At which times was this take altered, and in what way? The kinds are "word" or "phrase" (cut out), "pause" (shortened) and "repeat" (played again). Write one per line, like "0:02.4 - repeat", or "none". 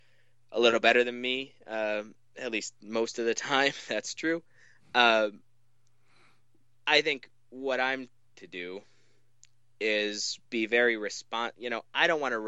0:08.3 - word
0:10.5 - pause